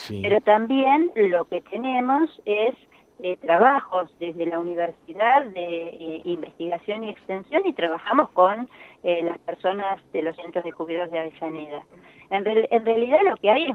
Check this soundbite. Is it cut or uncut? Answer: uncut